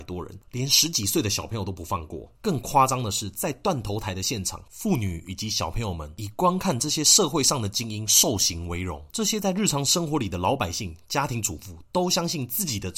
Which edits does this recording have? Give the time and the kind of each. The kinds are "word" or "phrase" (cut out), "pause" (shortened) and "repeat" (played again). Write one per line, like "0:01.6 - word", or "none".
0:02.3 - pause
0:09.1 - pause